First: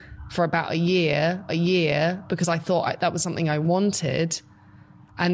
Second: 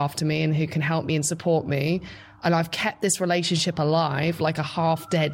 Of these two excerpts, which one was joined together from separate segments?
first; 1 cut; at 1.5 s

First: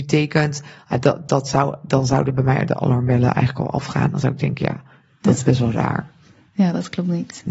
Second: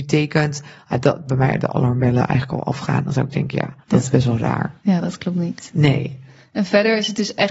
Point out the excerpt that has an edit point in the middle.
second; 3 cuts; at 1.3 s, 3.8 s, 4.8 s

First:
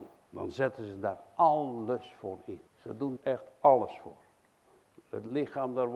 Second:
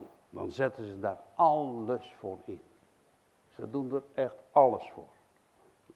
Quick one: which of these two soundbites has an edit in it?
first; 2 cuts; at 2.7 s, 3.2 s

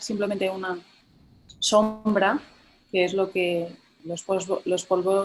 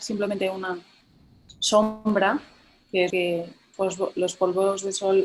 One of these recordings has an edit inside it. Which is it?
second; 2 cuts; at 3.1 s, 3.7 s

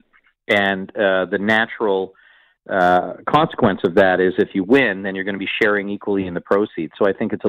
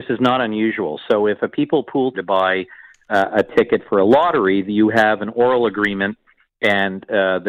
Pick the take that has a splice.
second; 1 cut; at 2.1 s

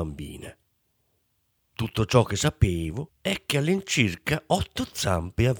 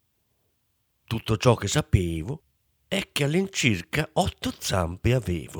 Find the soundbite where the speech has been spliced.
first; 1 cut; at 3.2 s

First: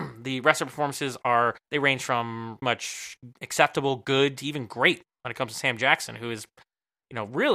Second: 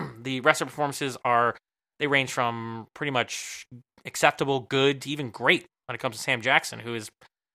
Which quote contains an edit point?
first; 3 cuts; at 1.6 s, 2.6 s, 3.4 s

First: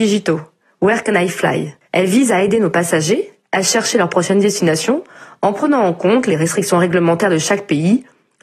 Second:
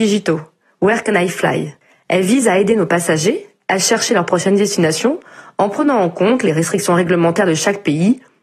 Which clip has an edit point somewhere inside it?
first; 1 cut; at 1.8 s

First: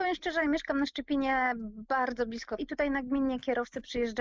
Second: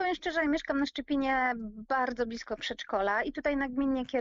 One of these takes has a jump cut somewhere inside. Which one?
first; 1 cut; at 2.6 s

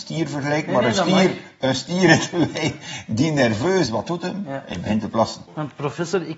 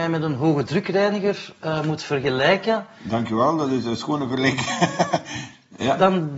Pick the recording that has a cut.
first; 1 cut; at 3.9 s

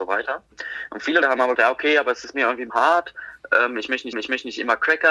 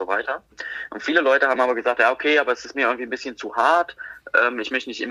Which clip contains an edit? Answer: first; 4 cuts; at 1.2 s, 1.5 s, 2.7 s, 4.1 s

